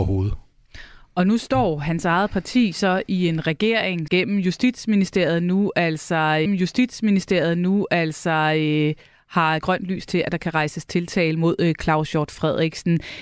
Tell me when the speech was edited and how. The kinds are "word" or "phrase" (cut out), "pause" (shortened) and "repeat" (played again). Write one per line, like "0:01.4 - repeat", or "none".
0:04.1 - word
0:06.5 - repeat
0:09.6 - word